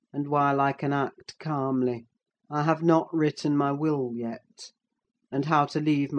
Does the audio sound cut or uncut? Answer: cut